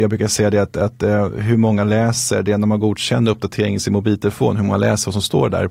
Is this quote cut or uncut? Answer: uncut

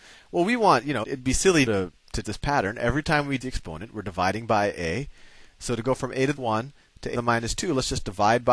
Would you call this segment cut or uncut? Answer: cut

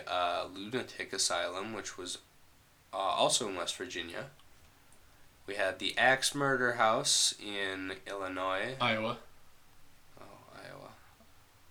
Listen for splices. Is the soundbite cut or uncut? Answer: uncut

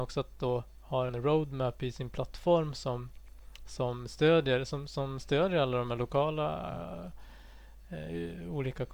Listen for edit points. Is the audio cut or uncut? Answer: cut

